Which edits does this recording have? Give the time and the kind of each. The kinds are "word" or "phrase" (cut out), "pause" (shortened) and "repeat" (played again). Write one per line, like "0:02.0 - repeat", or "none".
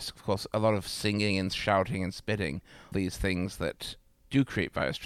0:02.9 - word